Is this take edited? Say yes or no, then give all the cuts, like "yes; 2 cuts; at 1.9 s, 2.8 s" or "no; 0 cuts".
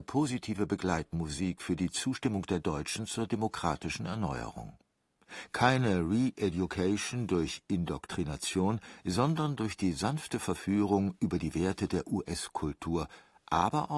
no; 0 cuts